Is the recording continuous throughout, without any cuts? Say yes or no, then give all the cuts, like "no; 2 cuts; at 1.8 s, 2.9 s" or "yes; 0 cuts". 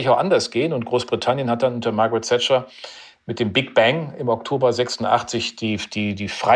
yes; 0 cuts